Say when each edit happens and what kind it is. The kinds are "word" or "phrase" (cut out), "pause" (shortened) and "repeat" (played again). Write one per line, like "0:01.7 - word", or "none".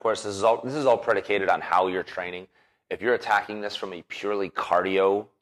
none

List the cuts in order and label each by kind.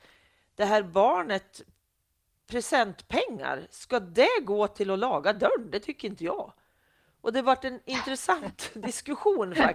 none

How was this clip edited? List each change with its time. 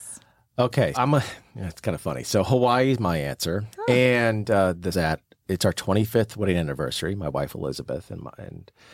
0:00.9 - word
0:03.7 - pause
0:04.9 - phrase

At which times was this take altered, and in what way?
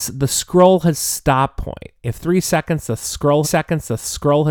0:01.6 - phrase
0:02.2 - word
0:03.4 - repeat

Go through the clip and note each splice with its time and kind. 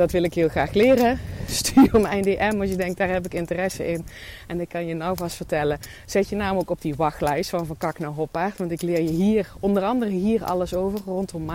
none

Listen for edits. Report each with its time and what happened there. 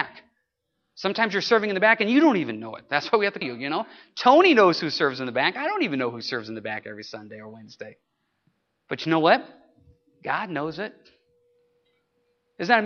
0:03.4 - phrase

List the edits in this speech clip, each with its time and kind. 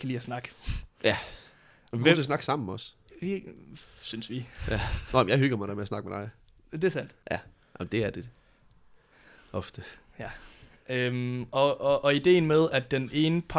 none

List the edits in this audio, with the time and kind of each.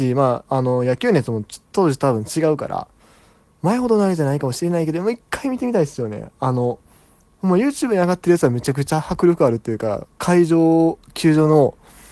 none

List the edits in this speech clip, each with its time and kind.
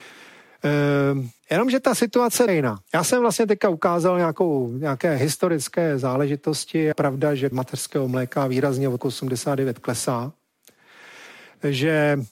0:01.4 - pause
0:02.5 - word
0:02.9 - pause
0:06.9 - word
0:07.5 - word
0:09.0 - word

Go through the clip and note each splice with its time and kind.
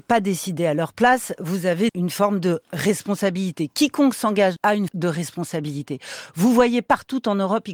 0:01.9 - word
0:04.6 - phrase
0:04.9 - word

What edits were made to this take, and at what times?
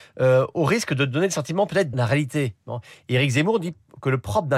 0:01.9 - phrase

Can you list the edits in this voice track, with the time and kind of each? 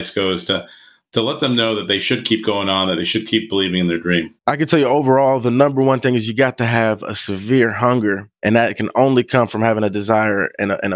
0:04.4 - pause

